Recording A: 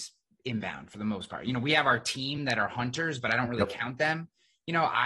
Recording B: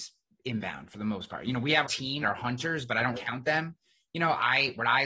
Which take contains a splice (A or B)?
B